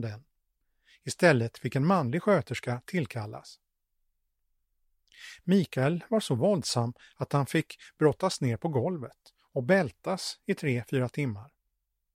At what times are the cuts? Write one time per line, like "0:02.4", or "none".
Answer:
none